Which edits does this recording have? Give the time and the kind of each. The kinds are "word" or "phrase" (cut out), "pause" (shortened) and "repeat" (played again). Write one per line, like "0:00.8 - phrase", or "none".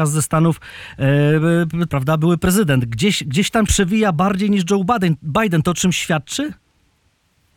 0:01.9 - word
0:03.7 - word